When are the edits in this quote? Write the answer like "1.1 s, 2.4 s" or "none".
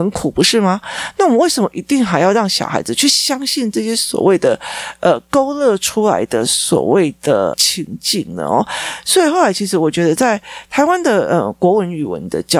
7.5 s